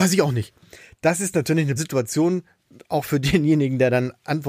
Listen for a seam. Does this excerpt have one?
yes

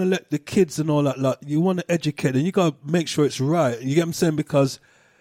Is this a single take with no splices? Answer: yes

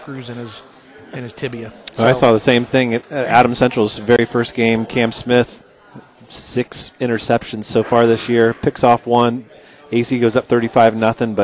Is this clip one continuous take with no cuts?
yes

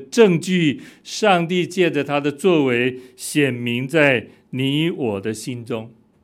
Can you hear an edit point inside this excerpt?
no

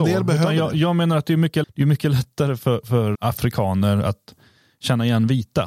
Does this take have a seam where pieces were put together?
yes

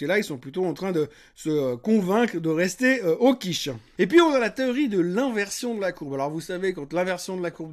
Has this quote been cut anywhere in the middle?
no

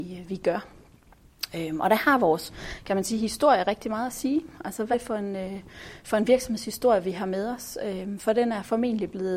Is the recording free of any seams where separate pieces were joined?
no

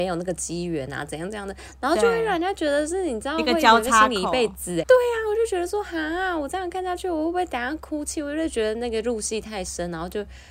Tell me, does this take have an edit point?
yes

